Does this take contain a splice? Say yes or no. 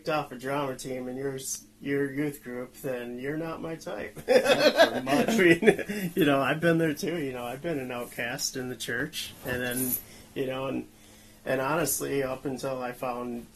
no